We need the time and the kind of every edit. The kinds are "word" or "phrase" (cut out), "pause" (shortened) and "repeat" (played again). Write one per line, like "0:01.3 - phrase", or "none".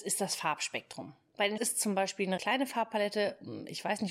0:01.6 - word
0:02.4 - word

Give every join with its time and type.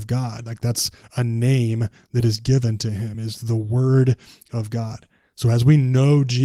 none

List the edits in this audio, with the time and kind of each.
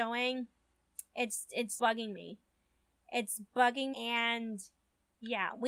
0:01.1 - pause
0:01.8 - word
0:03.9 - word

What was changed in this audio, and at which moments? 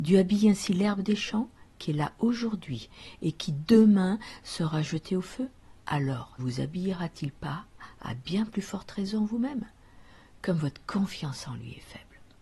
0:06.4 - word

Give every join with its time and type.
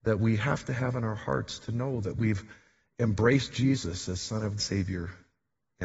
0:04.6 - word

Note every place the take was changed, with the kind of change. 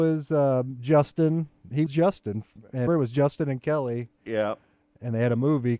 0:01.9 - word
0:02.9 - word

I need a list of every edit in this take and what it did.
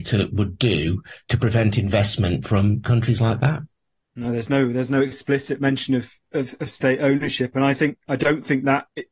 none

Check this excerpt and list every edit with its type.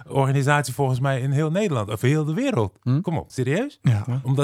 0:03.3 - word

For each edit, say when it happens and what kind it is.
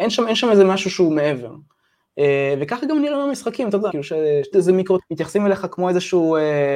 0:03.9 - word
0:04.5 - phrase
0:05.0 - word

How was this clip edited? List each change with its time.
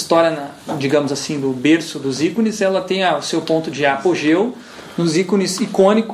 none

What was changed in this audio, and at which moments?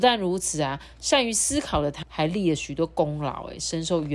0:02.0 - word

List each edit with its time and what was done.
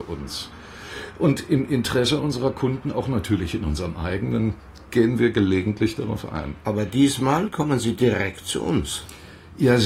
none

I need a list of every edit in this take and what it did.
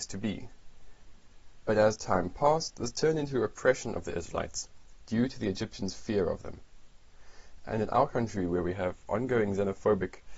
none

